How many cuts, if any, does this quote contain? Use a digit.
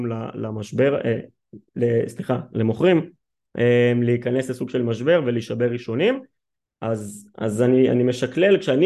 0